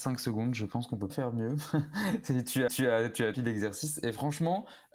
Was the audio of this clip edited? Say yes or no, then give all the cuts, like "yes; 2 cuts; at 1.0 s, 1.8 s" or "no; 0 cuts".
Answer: yes; 3 cuts; at 1.1 s, 2.7 s, 3.3 s